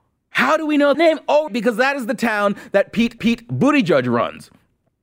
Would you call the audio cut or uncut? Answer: cut